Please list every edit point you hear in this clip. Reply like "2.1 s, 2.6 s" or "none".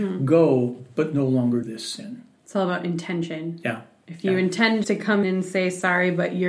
1.6 s, 4.8 s, 5.2 s